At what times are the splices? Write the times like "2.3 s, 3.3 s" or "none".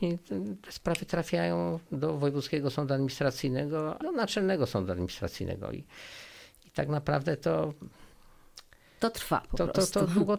4.0 s